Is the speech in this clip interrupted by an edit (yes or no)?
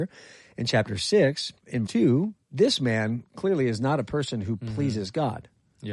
yes